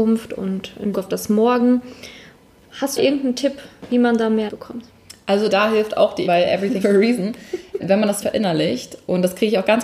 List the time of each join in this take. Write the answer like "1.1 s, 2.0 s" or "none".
0.9 s, 3.0 s, 4.5 s, 5.5 s, 6.2 s, 6.8 s, 7.8 s, 8.2 s